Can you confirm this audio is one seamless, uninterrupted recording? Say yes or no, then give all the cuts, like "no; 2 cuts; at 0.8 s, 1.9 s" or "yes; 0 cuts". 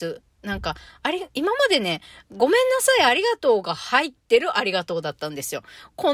yes; 0 cuts